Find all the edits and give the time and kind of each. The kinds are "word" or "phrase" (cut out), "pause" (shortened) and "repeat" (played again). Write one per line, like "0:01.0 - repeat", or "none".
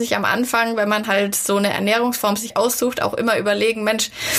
none